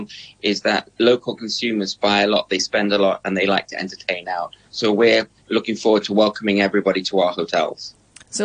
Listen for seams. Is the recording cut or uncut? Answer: uncut